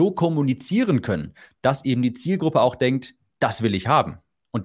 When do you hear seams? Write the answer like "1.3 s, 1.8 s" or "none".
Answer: none